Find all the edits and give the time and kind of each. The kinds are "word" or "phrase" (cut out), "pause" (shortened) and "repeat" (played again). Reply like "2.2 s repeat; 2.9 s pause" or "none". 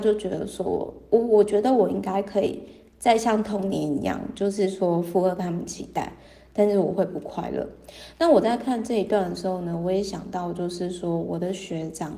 none